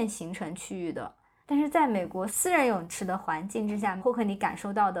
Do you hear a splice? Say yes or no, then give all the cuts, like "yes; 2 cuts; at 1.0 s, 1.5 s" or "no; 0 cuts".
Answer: no; 0 cuts